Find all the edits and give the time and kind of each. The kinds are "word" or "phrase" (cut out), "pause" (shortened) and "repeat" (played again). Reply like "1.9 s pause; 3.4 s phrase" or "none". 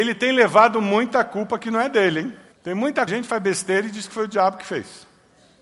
2.5 s pause; 3.1 s phrase

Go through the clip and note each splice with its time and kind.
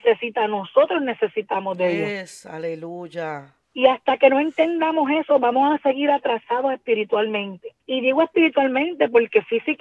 3.6 s pause; 7.8 s pause

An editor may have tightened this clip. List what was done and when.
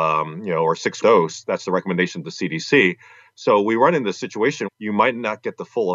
1.0 s phrase; 4.6 s word

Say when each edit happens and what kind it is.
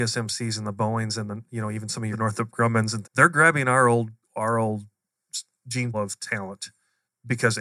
2.1 s phrase; 3.0 s word; 4.2 s pause; 5.9 s word

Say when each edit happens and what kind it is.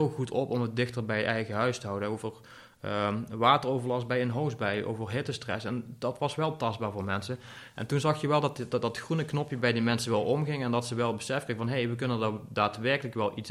none

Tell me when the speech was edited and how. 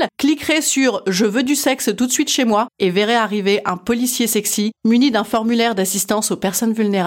none

